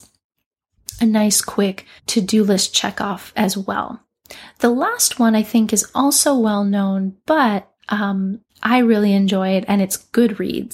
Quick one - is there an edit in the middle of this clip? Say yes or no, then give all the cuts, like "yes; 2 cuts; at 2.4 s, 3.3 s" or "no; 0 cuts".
yes; 2 cuts; at 2.0 s, 8.5 s